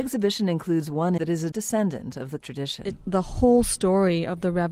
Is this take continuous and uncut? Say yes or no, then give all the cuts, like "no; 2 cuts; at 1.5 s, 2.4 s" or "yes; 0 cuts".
no; 4 cuts; at 1.2 s, 1.5 s, 2.4 s, 3.0 s